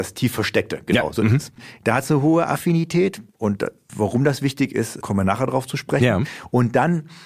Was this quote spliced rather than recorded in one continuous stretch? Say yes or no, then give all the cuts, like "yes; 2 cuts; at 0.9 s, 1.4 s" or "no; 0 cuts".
no; 0 cuts